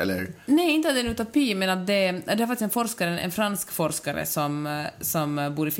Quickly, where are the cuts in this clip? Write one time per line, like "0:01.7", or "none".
none